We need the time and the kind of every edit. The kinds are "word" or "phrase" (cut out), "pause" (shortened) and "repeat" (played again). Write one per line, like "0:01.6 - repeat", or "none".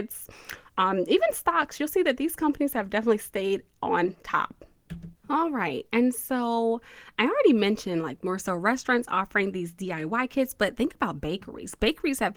0:05.2 - pause